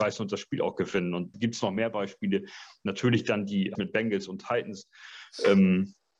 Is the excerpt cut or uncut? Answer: cut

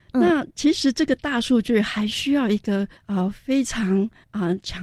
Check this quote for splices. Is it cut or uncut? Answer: cut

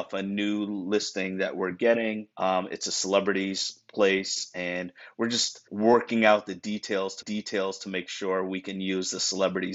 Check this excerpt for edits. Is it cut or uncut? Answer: cut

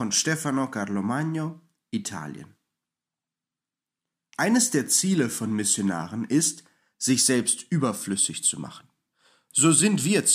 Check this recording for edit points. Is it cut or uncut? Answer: uncut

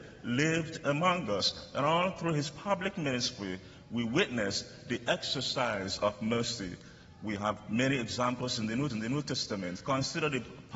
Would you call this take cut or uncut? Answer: cut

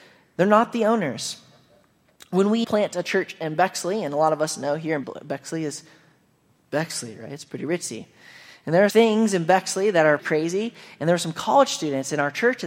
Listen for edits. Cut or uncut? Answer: cut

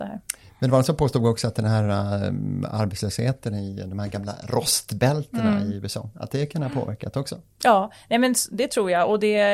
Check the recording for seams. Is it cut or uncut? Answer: uncut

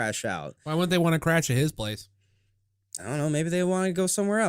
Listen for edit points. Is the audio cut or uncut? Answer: uncut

